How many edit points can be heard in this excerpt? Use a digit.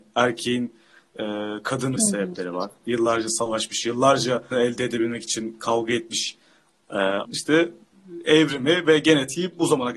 3